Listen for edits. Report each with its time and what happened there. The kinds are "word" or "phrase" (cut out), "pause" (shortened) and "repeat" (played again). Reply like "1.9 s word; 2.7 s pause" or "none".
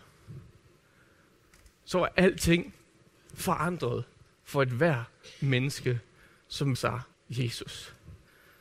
6.7 s word; 7.1 s word